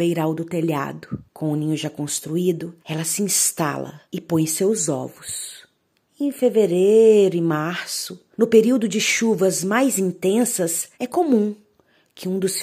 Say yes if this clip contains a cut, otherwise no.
yes